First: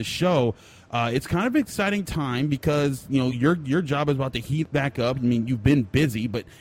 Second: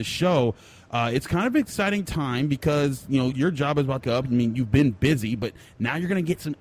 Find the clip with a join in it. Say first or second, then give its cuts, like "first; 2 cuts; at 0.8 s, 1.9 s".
second; 2 cuts; at 3.3 s, 4.0 s